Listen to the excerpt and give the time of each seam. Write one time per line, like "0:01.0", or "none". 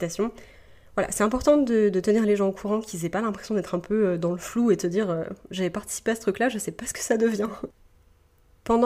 none